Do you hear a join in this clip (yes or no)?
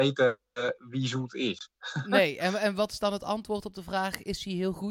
no